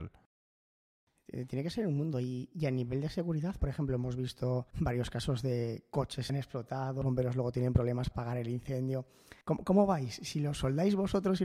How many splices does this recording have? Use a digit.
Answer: 6